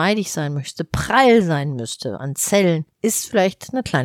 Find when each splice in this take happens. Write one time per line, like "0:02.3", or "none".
none